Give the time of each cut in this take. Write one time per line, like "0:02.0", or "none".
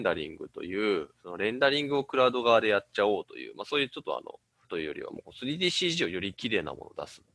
0:04.6